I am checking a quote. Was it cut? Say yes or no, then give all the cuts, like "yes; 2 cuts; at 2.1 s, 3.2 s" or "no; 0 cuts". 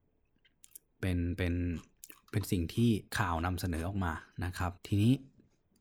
yes; 2 cuts; at 3.1 s, 4.8 s